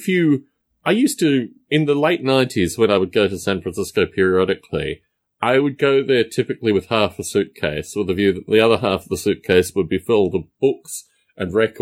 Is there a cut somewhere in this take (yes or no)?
no